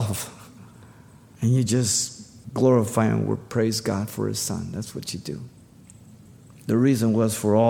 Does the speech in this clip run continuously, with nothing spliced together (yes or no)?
yes